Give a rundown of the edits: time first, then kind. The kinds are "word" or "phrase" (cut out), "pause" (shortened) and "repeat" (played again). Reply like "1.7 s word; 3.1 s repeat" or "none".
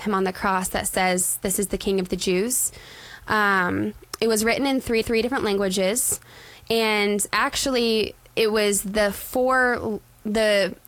5.0 s repeat